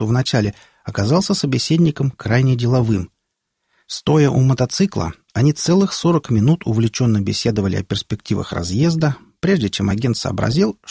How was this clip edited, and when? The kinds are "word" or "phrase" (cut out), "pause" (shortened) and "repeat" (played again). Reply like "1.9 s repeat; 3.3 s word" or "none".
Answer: none